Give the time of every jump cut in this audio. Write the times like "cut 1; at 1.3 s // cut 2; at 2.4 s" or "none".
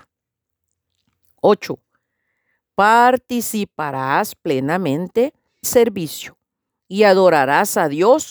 cut 1; at 5.6 s